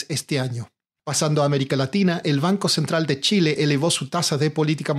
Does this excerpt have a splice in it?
no; 0 cuts

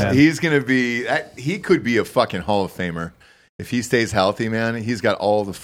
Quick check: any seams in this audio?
no; 0 cuts

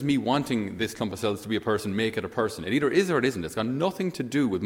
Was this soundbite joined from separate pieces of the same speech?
no; 0 cuts

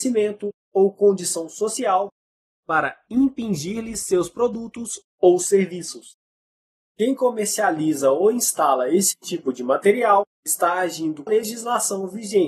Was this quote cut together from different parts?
yes; 2 cuts; at 10.3 s, 11.3 s

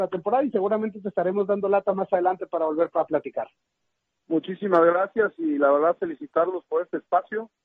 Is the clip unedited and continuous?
yes; 0 cuts

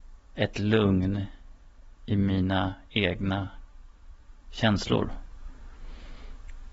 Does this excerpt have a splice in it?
no; 0 cuts

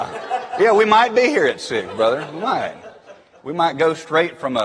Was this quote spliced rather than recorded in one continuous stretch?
no; 0 cuts

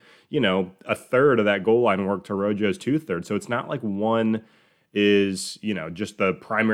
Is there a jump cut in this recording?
no; 0 cuts

